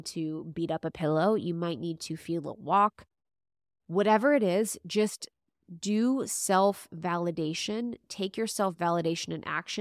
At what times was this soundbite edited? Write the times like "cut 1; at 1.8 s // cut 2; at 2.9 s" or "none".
none